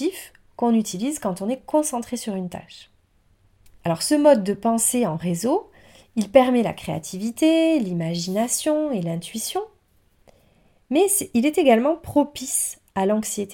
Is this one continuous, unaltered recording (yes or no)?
yes